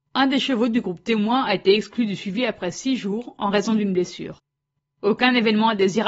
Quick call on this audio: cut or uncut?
uncut